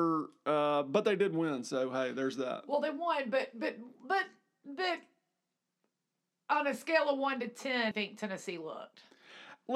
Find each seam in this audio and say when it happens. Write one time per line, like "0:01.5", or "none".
0:07.9